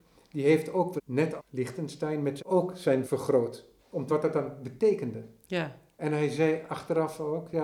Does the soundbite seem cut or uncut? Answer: cut